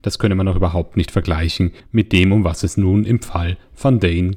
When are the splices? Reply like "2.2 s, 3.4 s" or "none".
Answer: 1.8 s